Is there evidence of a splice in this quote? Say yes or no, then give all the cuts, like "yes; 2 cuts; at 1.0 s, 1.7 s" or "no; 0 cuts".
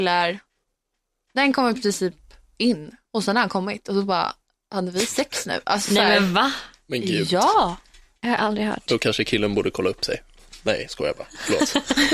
yes; 1 cut; at 3.0 s